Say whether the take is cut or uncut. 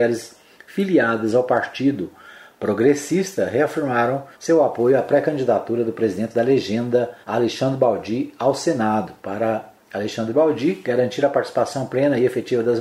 cut